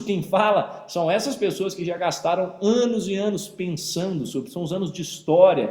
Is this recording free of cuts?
yes; 0 cuts

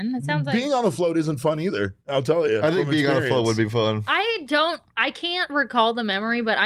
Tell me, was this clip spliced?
yes; 2 cuts; at 2.0 s, 4.9 s

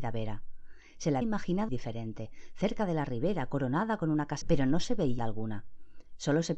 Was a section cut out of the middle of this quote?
yes; 4 cuts; at 1.2 s, 1.7 s, 4.4 s, 5.2 s

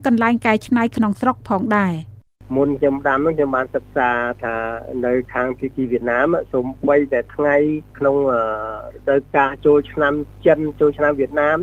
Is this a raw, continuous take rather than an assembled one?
no; 1 cut; at 2.3 s

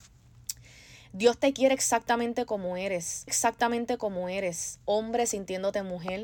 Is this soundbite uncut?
no; 1 cut; at 3.3 s

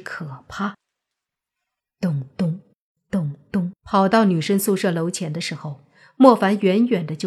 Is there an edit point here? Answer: yes; 1 cut; at 3.8 s

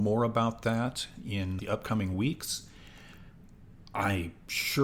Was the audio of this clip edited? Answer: yes; 1 cut; at 1.6 s

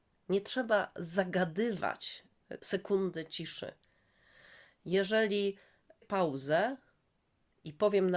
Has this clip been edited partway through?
yes; 2 cuts; at 2.6 s, 6.0 s

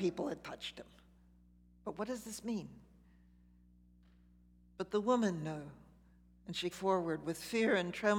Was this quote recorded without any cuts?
no; 1 cut; at 6.7 s

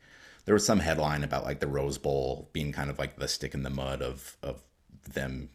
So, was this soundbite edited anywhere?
no; 0 cuts

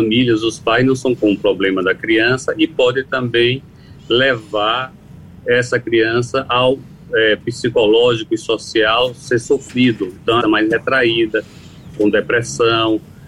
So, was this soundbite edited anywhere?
yes; 3 cuts; at 1.2 s, 7.1 s, 10.4 s

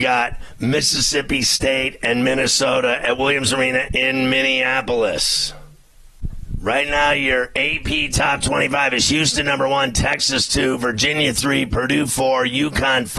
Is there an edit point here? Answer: no; 0 cuts

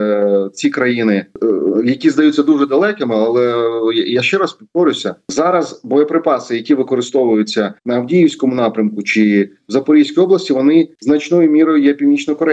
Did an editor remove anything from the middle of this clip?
yes; 1 cut; at 7.8 s

